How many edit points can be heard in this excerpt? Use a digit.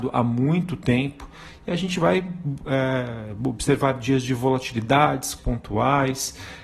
1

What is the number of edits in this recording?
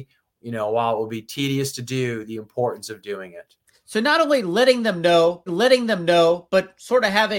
2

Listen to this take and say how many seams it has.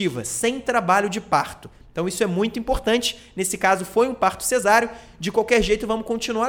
0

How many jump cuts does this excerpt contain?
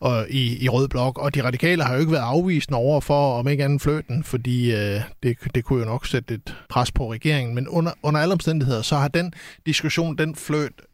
1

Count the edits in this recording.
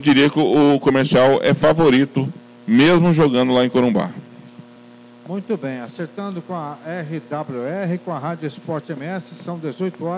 1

